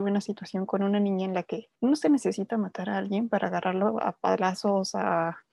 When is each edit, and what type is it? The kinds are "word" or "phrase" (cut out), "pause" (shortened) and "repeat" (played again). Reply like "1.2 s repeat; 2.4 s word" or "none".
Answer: 1.7 s pause